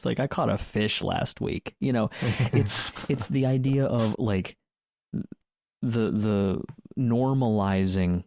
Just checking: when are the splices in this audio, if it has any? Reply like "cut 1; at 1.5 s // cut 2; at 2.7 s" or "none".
cut 1; at 4.1 s